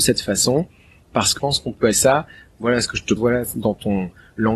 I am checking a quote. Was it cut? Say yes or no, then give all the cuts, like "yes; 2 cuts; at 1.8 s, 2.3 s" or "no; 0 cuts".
yes; 3 cuts; at 1.4 s, 1.9 s, 3.2 s